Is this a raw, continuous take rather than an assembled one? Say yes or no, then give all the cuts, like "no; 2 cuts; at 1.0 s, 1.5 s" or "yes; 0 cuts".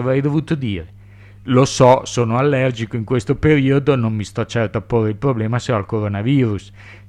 yes; 0 cuts